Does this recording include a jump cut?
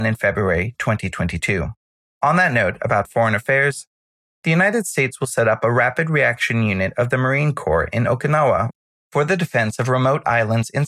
no; 0 cuts

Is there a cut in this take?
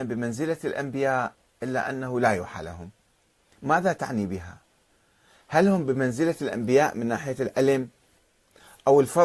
no; 0 cuts

